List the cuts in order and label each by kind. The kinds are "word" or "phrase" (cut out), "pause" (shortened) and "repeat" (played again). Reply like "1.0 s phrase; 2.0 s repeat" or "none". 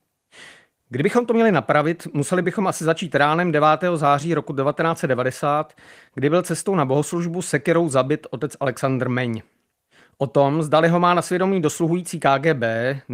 none